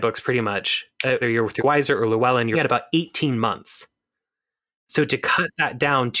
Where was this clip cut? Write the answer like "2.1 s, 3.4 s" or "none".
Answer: 1.2 s, 1.6 s, 2.5 s

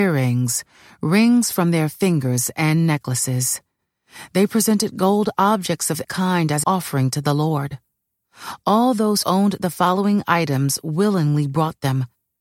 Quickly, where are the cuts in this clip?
6.0 s, 6.6 s, 9.2 s

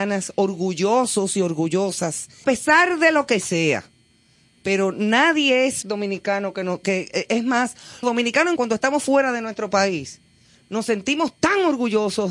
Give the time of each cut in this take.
2.4 s, 5.8 s, 8.0 s, 8.6 s

